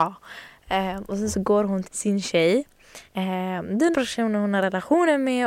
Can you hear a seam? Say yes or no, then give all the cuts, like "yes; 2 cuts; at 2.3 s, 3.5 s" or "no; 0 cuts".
yes; 3 cuts; at 1.8 s, 3.1 s, 3.9 s